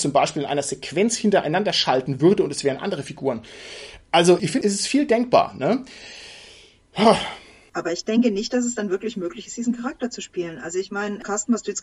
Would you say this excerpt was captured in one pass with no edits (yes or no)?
yes